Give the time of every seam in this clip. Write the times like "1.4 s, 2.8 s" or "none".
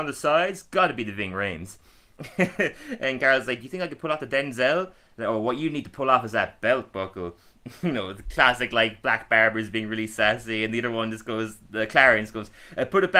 none